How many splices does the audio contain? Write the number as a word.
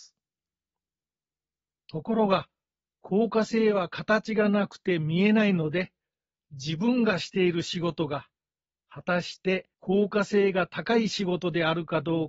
one